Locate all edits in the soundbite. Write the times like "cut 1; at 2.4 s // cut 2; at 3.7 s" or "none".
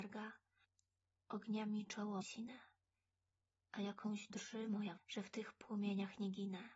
cut 1; at 2.2 s // cut 2; at 4.3 s // cut 3; at 5.0 s